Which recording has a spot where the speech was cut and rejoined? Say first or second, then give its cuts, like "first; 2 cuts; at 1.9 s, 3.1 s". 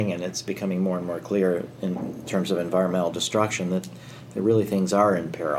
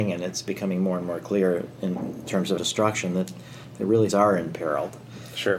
second; 2 cuts; at 2.6 s, 4.1 s